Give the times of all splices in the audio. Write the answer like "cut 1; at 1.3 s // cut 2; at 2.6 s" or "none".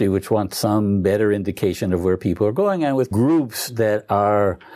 cut 1; at 3.1 s